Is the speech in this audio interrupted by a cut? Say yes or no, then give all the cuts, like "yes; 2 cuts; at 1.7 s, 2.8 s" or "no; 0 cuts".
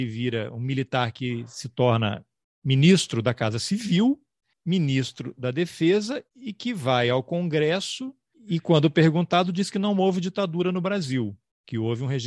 yes; 1 cut; at 6.3 s